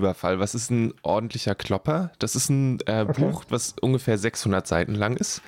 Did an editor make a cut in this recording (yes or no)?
no